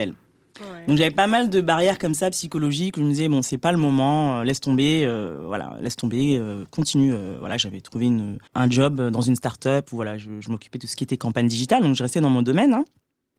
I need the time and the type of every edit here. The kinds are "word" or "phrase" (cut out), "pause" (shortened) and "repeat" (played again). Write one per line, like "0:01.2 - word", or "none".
0:08.5 - pause